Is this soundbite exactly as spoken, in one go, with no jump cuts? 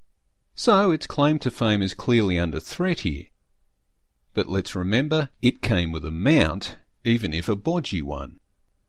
yes; 0 cuts

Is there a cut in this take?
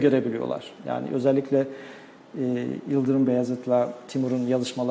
no; 0 cuts

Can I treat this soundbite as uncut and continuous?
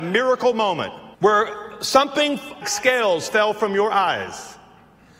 no; 2 cuts; at 1.1 s, 2.6 s

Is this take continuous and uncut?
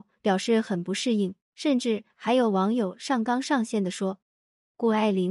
no; 2 cuts; at 1.4 s, 4.2 s

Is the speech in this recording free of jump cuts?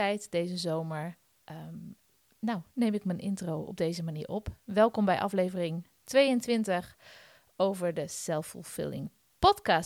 yes; 0 cuts

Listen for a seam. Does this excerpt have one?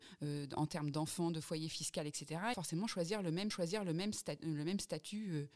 yes; 2 cuts; at 2.5 s, 3.5 s

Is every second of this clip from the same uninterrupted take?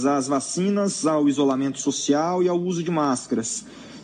yes; 0 cuts

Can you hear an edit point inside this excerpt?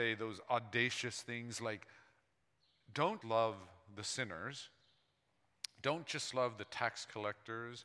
yes; 1 cut; at 3.2 s

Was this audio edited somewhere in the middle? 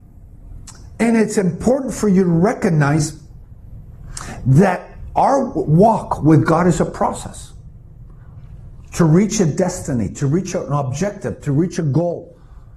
no; 0 cuts

